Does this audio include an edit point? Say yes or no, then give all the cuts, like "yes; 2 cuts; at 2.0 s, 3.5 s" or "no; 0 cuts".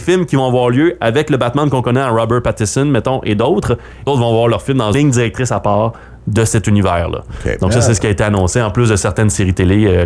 yes; 2 cuts; at 4.1 s, 4.9 s